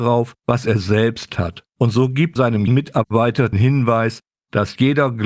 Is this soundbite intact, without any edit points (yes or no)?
no